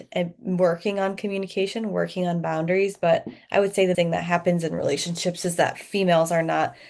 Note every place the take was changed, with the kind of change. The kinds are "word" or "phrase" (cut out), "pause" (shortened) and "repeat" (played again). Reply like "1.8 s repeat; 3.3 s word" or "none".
3.9 s word